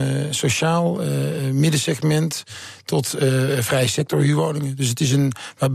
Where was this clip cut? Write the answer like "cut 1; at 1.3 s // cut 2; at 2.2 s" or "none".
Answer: none